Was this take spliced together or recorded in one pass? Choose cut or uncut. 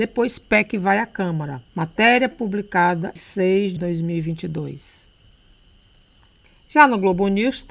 cut